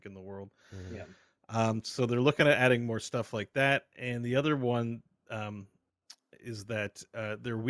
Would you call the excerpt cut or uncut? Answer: uncut